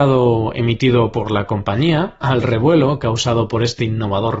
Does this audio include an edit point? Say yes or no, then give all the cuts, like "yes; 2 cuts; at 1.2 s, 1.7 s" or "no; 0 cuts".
yes; 1 cut; at 2.2 s